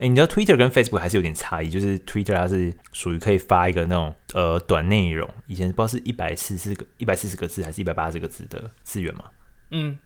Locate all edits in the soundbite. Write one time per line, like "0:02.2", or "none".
none